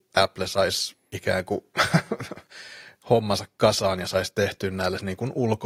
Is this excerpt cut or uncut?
cut